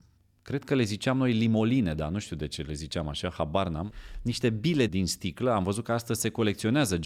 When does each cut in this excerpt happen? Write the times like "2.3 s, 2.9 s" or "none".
4.9 s

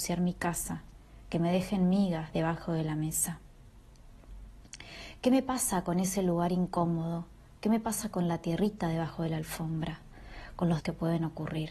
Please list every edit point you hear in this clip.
10.8 s

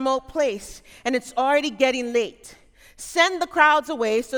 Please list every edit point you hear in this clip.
none

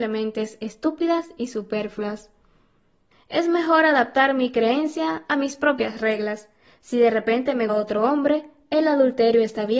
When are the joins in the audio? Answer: 7.7 s

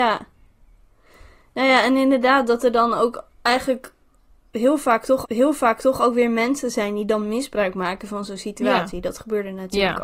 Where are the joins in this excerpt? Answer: 5.2 s

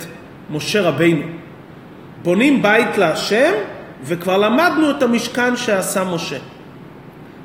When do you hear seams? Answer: none

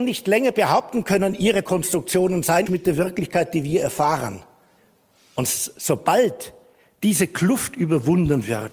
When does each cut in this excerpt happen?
1.7 s, 2.7 s, 4.8 s

